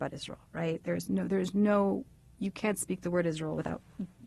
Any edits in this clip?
no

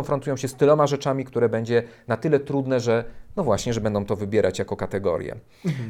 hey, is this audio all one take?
yes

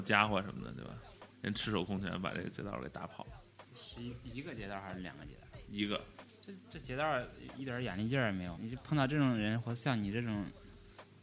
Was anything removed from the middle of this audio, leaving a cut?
yes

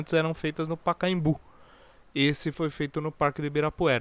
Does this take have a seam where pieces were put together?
no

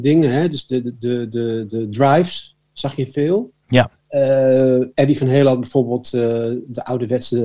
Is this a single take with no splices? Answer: no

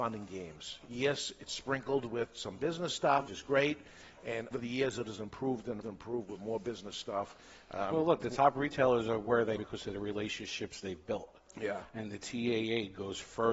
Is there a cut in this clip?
yes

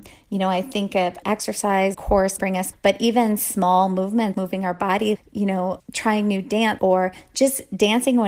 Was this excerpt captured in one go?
no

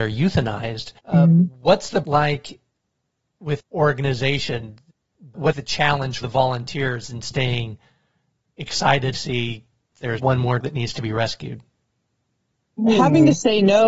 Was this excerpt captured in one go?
no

